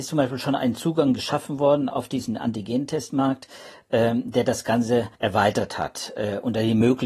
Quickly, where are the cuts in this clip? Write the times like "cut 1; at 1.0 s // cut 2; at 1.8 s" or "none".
cut 1; at 5.1 s